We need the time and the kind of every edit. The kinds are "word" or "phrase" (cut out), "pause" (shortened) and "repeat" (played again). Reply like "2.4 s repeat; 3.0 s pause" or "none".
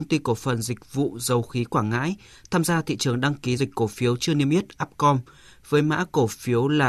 3.6 s word